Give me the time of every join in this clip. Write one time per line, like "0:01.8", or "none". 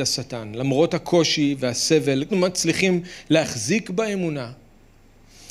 0:02.3